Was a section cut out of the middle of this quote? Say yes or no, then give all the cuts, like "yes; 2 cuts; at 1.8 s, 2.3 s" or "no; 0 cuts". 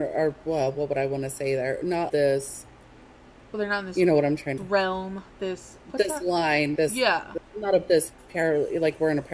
yes; 4 cuts; at 2.1 s, 4.6 s, 6.8 s, 7.4 s